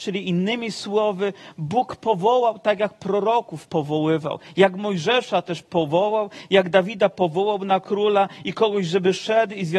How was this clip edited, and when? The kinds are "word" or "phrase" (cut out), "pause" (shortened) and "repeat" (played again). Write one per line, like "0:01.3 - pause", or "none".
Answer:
none

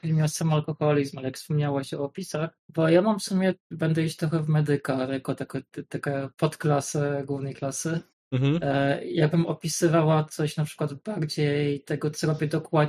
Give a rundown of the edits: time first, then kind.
0:02.6 - pause
0:03.6 - pause
0:08.1 - pause

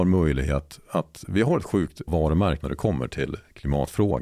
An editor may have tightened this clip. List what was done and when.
0:02.1 - word
0:02.6 - word

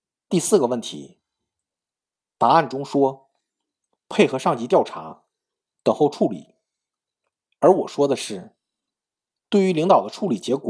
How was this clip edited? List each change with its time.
none

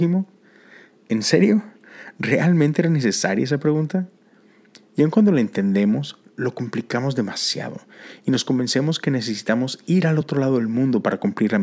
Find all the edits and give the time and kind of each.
none

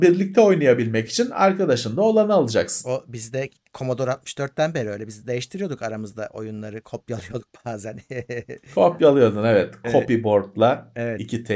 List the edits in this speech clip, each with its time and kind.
none

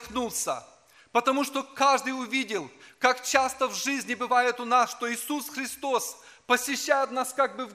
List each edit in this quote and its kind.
none

